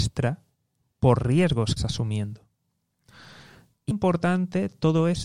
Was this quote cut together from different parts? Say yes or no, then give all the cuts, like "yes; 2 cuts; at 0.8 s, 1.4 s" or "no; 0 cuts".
yes; 3 cuts; at 1.2 s, 1.8 s, 3.9 s